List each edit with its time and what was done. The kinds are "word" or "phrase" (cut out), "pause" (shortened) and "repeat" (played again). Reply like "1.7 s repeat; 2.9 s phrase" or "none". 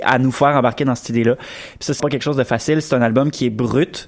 2.0 s word